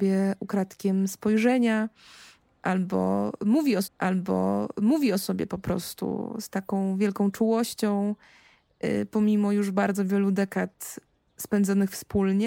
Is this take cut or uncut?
cut